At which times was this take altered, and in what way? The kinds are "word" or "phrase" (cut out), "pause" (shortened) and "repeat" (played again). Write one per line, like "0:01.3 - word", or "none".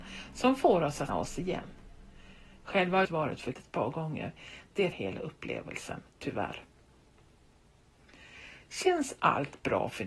0:01.1 - word
0:03.0 - phrase
0:03.5 - word
0:04.9 - word